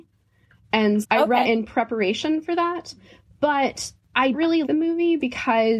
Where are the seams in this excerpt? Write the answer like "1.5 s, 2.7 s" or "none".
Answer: 1.0 s, 1.4 s, 4.3 s, 4.6 s